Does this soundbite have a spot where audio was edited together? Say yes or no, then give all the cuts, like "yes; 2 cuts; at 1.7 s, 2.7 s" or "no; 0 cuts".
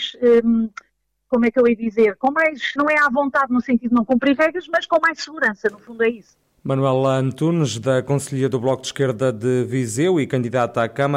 yes; 1 cut; at 2.8 s